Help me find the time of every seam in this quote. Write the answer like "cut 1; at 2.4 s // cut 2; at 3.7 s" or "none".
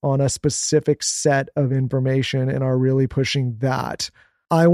none